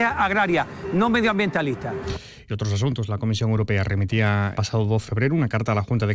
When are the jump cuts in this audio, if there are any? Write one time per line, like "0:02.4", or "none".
0:04.5
0:05.1